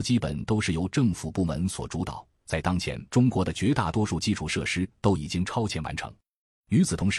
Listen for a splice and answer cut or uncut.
cut